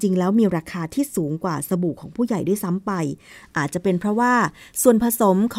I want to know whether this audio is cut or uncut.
uncut